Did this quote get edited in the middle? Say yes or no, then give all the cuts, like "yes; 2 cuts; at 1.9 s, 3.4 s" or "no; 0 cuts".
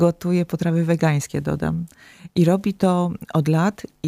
no; 0 cuts